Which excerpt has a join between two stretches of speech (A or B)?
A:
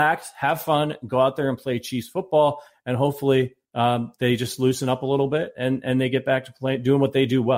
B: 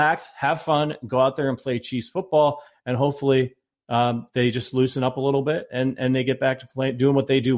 A